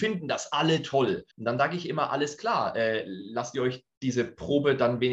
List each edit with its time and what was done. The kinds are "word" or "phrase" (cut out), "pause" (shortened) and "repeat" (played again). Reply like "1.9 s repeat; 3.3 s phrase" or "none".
1.3 s pause